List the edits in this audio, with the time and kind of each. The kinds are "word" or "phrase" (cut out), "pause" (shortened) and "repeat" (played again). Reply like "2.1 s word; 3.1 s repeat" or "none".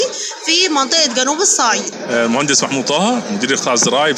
none